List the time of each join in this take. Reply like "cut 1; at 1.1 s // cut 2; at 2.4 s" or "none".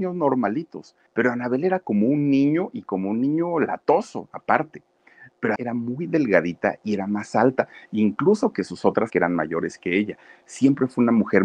cut 1; at 1.1 s // cut 2; at 5.6 s // cut 3; at 9.1 s